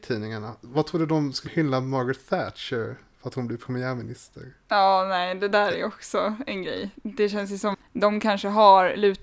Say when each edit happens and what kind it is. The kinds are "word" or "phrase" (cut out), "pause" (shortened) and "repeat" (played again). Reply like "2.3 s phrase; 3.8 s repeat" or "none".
1.5 s word; 7.7 s word